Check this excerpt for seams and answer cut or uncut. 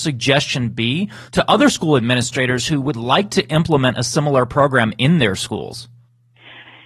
cut